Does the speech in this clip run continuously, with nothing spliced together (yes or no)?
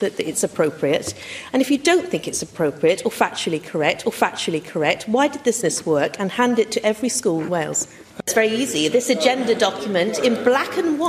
no